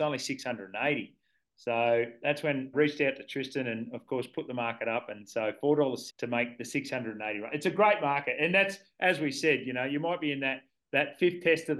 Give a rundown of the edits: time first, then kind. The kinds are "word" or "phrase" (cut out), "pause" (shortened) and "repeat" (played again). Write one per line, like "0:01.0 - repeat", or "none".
0:02.7 - word
0:06.1 - word